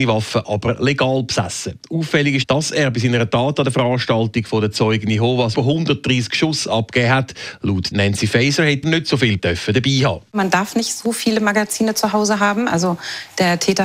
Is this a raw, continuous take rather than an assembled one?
no; 5 cuts; at 2.4 s, 5.5 s, 7.9 s, 8.8 s, 9.4 s

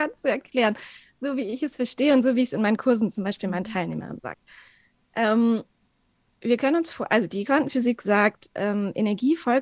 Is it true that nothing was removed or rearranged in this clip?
yes; 0 cuts

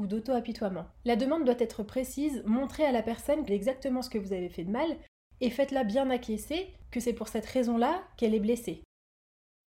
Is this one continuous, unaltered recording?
no; 2 cuts; at 0.9 s, 3.5 s

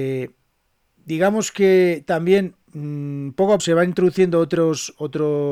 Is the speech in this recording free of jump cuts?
no; 2 cuts; at 2.6 s, 3.6 s

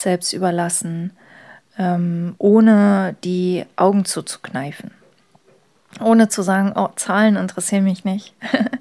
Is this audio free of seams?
yes; 0 cuts

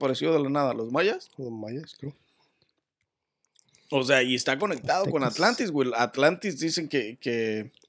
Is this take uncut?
yes; 0 cuts

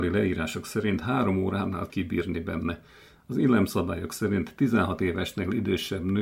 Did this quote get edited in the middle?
yes; 1 cut; at 1.9 s

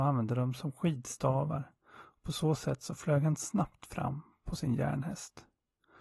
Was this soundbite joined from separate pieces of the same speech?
no; 0 cuts

